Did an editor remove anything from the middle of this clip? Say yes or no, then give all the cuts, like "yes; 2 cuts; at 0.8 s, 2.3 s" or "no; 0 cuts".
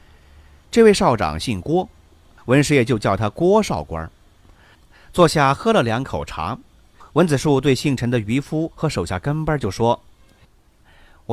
no; 0 cuts